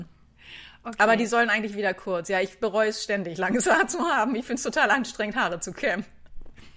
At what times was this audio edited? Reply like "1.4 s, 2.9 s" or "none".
none